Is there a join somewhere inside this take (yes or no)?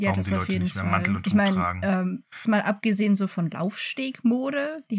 yes